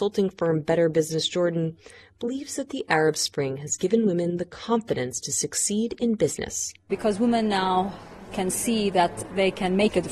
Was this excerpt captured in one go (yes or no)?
yes